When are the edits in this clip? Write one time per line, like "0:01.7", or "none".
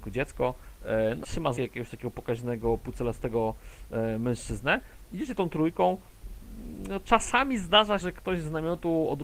0:01.2
0:01.6
0:08.0